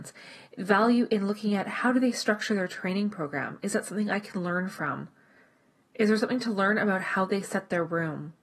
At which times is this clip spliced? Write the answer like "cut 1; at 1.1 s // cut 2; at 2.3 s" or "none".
none